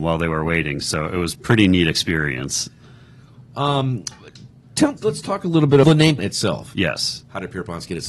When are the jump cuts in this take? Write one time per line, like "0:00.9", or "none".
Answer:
0:01.3
0:05.0
0:05.8
0:06.2

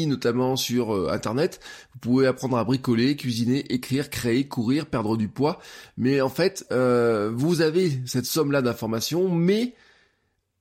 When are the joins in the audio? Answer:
none

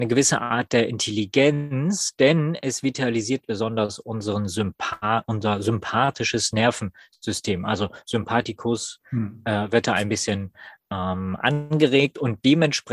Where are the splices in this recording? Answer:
none

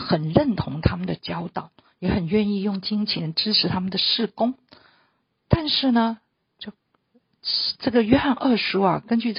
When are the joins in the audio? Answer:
none

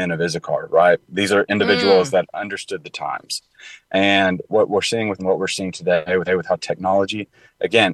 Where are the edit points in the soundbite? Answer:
0:02.3
0:05.2
0:06.3

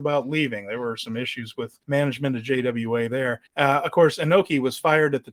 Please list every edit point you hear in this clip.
0:01.8
0:03.5

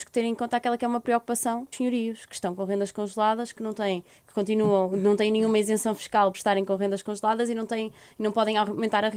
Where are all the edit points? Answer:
0:01.7
0:06.3

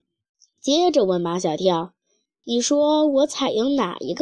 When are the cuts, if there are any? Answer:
none

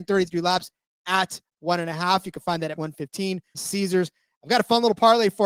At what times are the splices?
0:01.6
0:02.8
0:03.5

